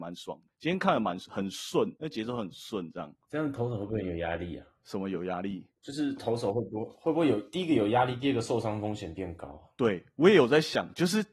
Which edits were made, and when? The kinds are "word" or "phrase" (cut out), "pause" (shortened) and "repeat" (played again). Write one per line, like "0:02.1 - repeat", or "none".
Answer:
0:02.0 - pause
0:05.8 - pause